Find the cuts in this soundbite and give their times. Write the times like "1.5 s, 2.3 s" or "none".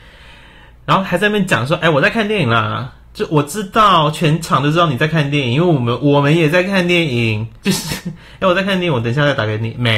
7.6 s